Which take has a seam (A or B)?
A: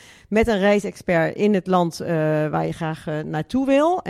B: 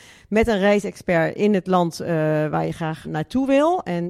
B